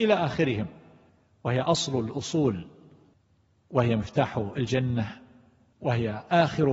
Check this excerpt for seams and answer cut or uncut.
uncut